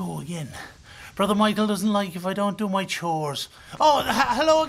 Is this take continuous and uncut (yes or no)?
yes